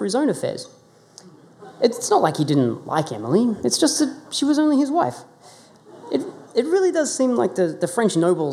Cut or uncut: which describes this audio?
uncut